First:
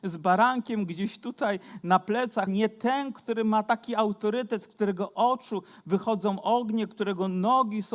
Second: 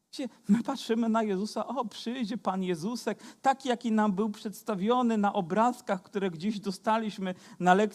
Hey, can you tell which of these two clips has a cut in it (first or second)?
first